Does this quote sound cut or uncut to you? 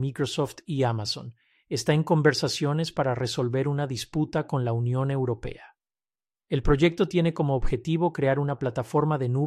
uncut